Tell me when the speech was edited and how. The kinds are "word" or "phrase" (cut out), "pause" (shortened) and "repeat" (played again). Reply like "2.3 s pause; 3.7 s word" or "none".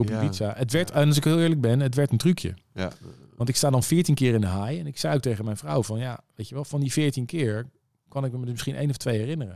none